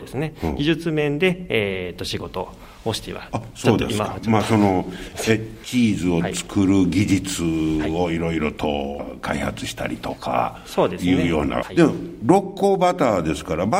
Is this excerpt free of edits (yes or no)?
no